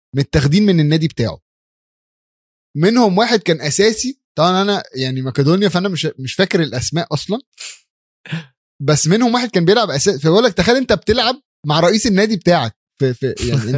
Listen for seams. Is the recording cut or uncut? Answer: uncut